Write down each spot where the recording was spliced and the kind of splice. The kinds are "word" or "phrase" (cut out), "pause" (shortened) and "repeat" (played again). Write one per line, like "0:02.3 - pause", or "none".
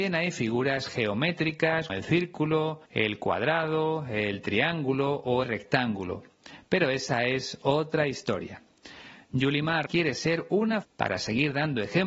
0:01.9 - word
0:02.8 - pause
0:05.4 - word
0:09.9 - word
0:10.8 - phrase

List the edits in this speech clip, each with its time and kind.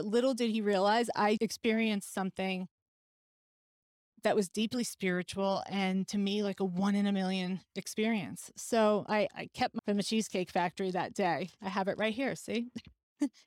0:01.4 - word
0:09.3 - word
0:09.8 - word

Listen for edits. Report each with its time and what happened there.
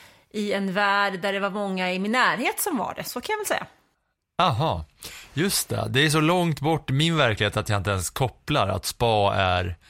none

